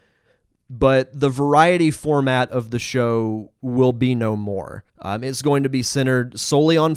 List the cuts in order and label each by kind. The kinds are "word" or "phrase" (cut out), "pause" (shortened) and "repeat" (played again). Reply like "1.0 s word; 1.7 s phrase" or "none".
4.9 s pause